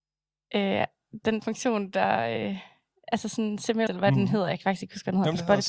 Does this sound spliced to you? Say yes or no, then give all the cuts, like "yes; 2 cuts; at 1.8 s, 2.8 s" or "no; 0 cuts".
yes; 2 cuts; at 1.4 s, 3.9 s